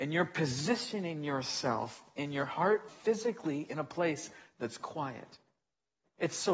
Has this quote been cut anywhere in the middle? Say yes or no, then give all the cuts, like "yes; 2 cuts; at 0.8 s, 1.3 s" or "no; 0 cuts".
yes; 1 cut; at 2.9 s